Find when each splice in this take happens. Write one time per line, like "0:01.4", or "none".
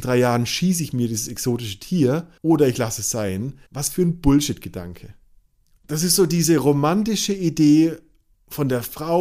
0:02.4
0:03.7
0:05.7